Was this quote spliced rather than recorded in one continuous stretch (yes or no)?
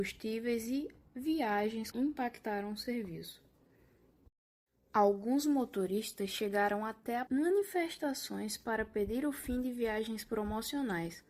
yes